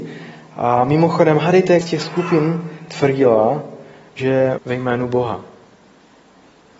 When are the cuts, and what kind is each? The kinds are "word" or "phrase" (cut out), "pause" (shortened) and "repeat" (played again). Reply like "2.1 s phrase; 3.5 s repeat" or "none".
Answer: 1.8 s word; 4.6 s word